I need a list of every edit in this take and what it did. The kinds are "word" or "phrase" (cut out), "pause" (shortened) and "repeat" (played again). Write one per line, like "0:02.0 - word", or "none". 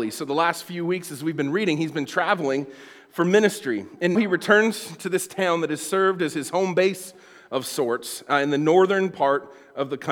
0:04.2 - word

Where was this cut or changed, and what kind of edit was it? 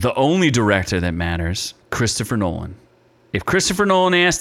0:01.8 - pause

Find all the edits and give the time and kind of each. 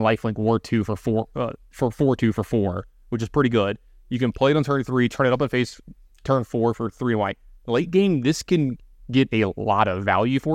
none

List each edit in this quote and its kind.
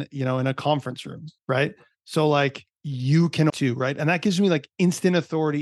0:01.4 - pause
0:02.7 - pause
0:03.5 - phrase

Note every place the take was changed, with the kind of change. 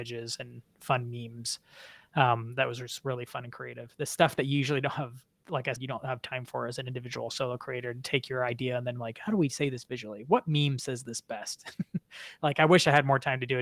0:05.8 - word

